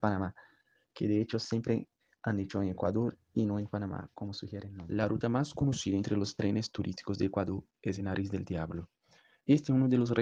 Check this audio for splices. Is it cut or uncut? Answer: uncut